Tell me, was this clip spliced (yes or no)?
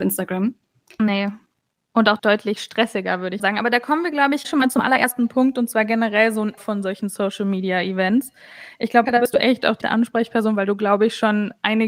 yes